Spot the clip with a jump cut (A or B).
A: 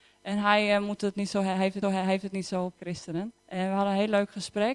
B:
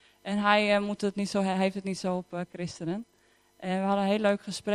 A